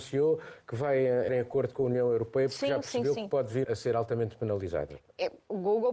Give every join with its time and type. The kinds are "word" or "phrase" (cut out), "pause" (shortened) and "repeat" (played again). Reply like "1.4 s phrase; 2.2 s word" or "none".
1.3 s word; 3.6 s word